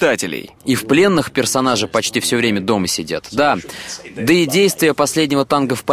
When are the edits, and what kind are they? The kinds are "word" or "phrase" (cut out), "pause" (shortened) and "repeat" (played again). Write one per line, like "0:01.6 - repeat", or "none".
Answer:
none